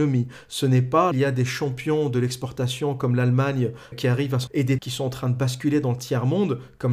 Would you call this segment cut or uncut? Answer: cut